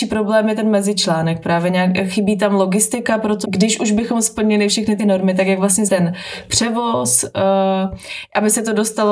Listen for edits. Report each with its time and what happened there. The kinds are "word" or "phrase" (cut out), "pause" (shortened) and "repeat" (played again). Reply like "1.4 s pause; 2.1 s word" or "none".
3.4 s word; 5.0 s word; 5.9 s word